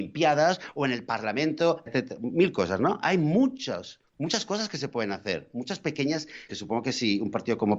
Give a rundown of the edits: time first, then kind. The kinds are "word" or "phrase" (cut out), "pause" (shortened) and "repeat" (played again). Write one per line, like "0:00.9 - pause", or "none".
0:01.9 - word
0:04.1 - pause
0:06.5 - word